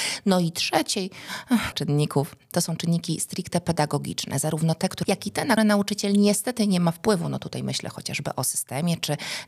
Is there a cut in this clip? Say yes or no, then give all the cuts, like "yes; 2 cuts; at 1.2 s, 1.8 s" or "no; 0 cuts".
yes; 3 cuts; at 1.7 s, 5.0 s, 5.6 s